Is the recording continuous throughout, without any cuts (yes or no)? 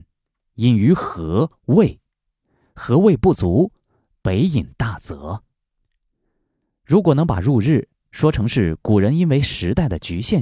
yes